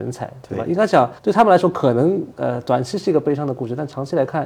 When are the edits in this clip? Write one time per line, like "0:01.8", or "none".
0:01.2